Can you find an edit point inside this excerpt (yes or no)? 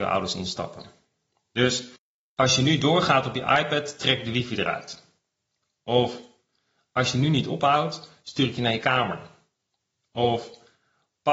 no